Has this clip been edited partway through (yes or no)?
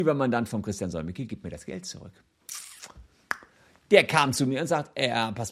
no